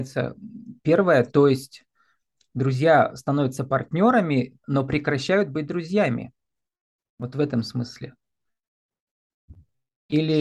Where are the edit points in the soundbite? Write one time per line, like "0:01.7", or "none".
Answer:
none